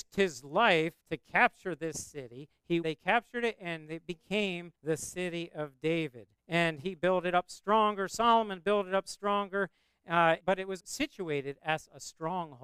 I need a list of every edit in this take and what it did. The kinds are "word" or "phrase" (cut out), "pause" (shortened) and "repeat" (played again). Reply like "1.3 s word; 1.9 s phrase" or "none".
1.0 s pause; 2.8 s phrase; 4.7 s pause; 6.4 s pause; 10.4 s word; 10.8 s word